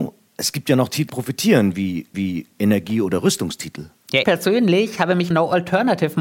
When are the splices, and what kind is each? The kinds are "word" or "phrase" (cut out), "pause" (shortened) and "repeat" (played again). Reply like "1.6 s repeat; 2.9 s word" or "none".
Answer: 1.1 s word; 2.1 s repeat; 4.2 s word; 5.3 s phrase